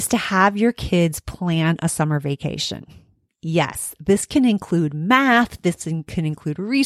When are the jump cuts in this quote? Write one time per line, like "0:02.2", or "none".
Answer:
none